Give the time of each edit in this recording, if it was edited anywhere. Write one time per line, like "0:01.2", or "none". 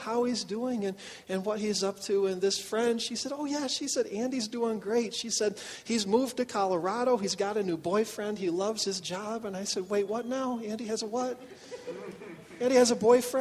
none